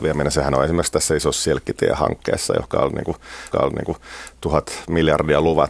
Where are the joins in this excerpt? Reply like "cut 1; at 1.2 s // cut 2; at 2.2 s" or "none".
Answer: cut 1; at 3.5 s